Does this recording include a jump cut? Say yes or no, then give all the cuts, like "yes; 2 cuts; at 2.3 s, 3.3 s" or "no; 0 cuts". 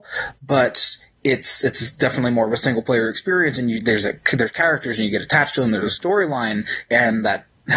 no; 0 cuts